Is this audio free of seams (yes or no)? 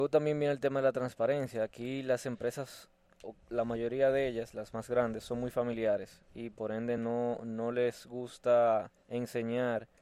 yes